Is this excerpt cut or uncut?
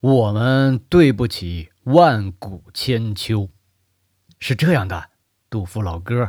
uncut